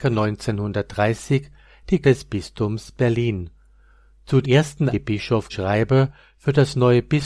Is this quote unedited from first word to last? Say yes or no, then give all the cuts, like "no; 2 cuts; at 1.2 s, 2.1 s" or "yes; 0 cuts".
no; 4 cuts; at 2.0 s, 4.4 s, 4.9 s, 5.5 s